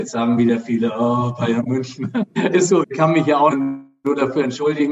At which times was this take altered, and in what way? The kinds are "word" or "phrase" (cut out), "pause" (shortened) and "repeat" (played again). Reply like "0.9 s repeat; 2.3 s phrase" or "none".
2.8 s word; 3.5 s phrase

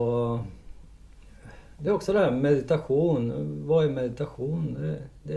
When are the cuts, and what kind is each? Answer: none

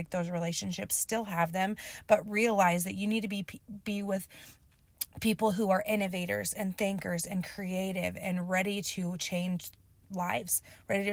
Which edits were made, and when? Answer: none

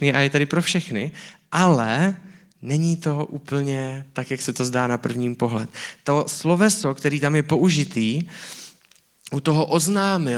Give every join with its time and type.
none

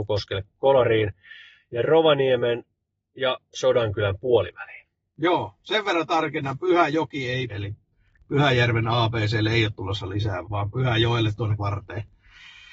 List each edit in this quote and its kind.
7.5 s word; 10.4 s word; 11.6 s word

